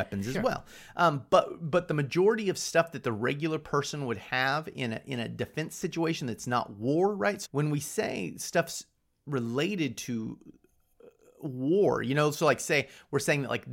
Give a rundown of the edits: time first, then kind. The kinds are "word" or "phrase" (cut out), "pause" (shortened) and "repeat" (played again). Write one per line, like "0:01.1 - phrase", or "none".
0:07.4 - word